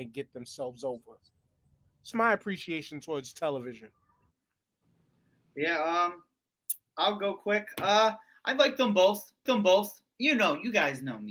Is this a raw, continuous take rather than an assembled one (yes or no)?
no